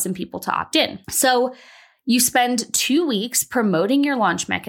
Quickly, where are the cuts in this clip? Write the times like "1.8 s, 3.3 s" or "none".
1.0 s